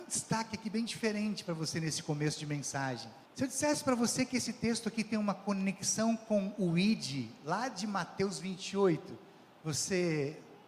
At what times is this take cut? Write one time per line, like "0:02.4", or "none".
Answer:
0:03.3